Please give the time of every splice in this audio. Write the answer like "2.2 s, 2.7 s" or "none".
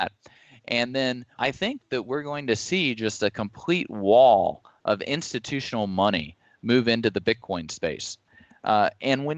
1.4 s